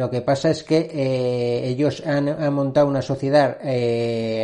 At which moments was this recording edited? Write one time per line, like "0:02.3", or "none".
none